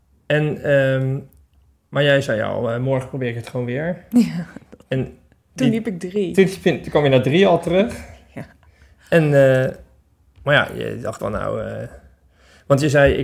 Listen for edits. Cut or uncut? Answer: cut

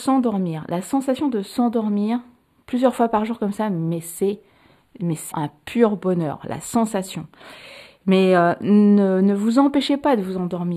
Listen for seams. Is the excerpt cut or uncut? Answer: cut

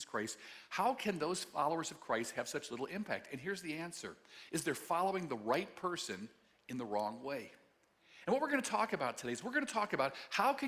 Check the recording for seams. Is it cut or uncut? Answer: uncut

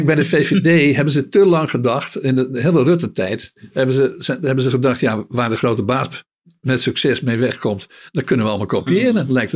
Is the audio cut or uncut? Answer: uncut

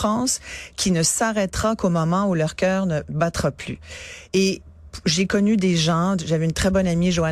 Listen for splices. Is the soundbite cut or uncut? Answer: uncut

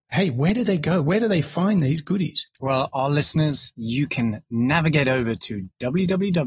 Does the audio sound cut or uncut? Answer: uncut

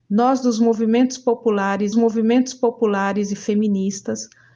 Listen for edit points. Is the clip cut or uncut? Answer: cut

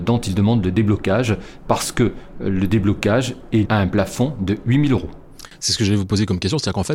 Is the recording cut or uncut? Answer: cut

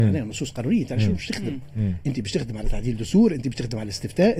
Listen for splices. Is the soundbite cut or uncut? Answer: uncut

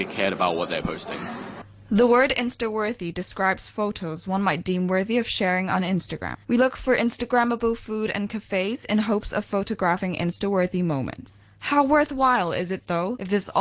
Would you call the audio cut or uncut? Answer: cut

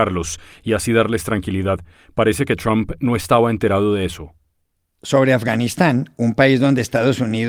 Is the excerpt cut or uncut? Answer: uncut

